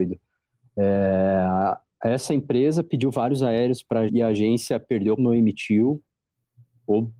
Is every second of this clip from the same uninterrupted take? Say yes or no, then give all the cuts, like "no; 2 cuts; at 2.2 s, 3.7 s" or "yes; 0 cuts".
no; 2 cuts; at 4.1 s, 5.2 s